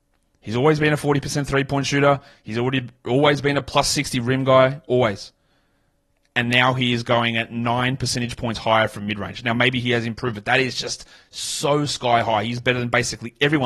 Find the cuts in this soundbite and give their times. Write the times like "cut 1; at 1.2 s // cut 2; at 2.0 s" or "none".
none